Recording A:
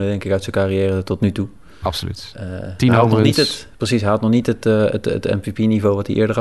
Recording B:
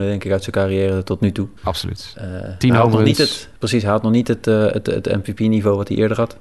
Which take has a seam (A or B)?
B